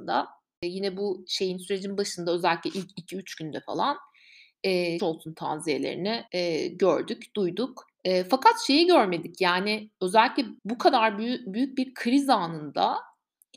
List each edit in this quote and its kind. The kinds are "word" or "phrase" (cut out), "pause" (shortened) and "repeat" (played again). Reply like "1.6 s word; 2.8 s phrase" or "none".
5.0 s phrase; 6.3 s pause; 7.9 s pause; 10.6 s pause